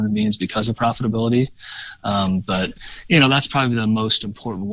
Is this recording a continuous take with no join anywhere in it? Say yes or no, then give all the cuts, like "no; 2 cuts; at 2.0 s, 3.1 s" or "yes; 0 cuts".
yes; 0 cuts